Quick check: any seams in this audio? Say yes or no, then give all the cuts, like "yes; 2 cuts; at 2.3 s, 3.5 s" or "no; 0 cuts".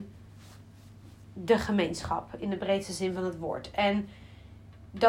no; 0 cuts